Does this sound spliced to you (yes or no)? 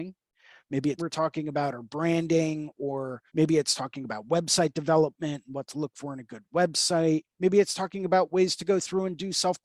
yes